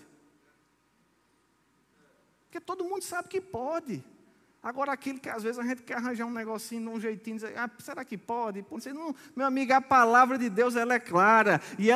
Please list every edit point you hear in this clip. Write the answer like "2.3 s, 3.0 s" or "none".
8.7 s